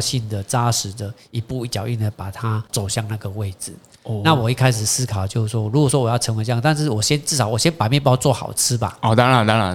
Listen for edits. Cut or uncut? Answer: cut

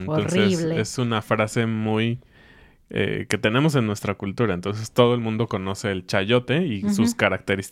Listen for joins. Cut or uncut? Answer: uncut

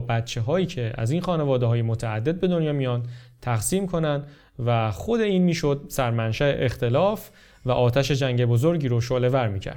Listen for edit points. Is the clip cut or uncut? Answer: uncut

